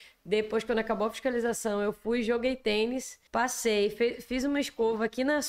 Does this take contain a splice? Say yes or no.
yes